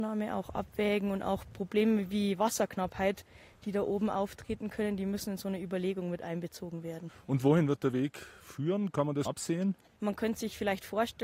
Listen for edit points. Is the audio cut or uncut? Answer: cut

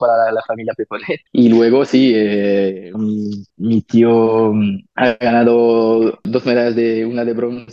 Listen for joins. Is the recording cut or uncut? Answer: cut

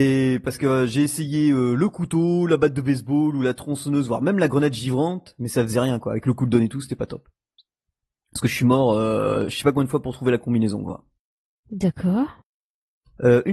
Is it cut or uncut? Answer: uncut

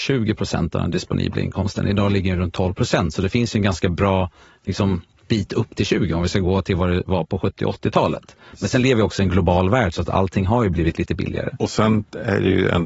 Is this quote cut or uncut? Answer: uncut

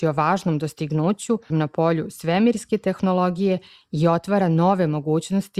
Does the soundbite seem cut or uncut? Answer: cut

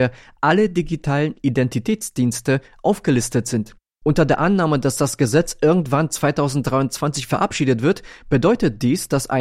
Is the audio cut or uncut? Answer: uncut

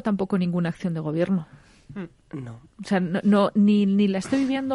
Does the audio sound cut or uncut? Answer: uncut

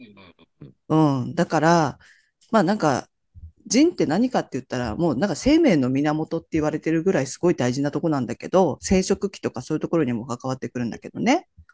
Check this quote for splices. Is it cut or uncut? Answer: cut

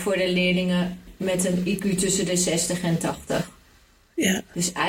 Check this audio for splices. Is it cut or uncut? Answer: uncut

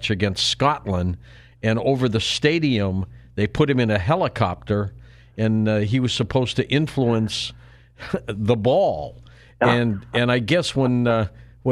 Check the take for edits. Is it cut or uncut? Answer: uncut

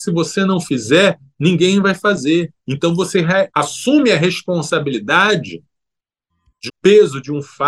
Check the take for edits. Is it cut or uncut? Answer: cut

